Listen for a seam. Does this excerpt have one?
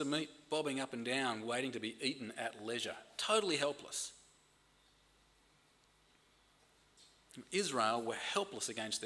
no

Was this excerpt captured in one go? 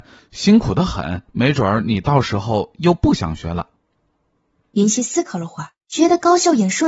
no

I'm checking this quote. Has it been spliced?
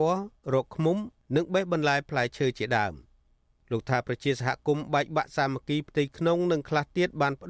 no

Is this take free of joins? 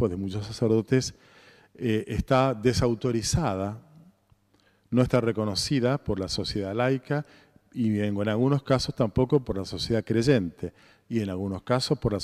yes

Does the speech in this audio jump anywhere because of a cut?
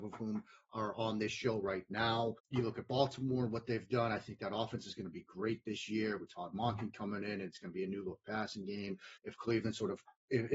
yes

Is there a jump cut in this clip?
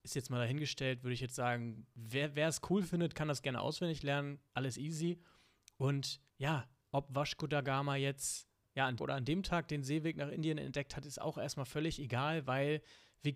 yes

